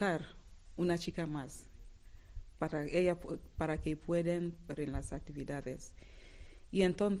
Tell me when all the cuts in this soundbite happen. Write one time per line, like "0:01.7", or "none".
0:02.6
0:04.8